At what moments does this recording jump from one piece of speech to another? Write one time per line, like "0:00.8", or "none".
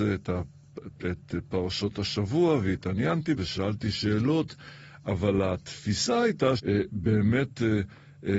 0:03.4
0:06.6